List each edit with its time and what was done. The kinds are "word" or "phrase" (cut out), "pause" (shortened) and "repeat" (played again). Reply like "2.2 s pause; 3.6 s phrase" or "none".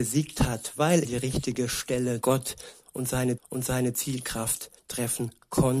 1.0 s word; 2.2 s word; 3.4 s repeat